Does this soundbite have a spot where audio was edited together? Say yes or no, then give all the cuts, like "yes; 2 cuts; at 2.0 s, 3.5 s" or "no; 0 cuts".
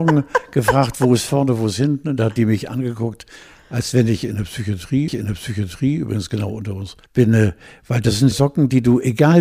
yes; 3 cuts; at 5.1 s, 7.1 s, 8.3 s